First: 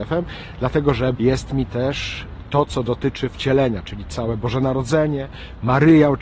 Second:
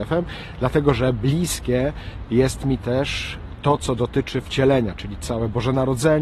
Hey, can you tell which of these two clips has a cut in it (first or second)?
first